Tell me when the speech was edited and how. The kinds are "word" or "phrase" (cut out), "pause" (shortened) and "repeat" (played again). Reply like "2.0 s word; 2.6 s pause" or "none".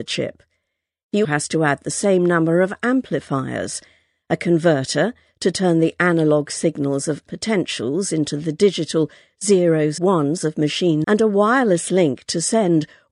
1.2 s word; 7.3 s word; 10.0 s word; 11.0 s word